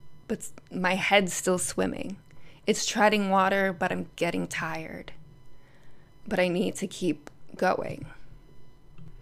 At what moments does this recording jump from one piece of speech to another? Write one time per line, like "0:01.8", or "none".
none